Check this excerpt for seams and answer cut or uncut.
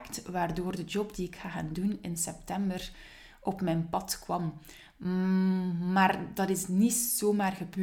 uncut